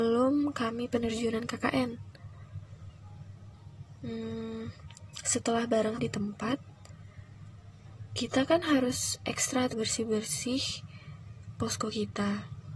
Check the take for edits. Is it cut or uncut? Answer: cut